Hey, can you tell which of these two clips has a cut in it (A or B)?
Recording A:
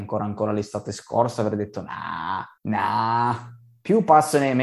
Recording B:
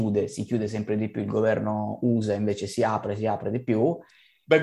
A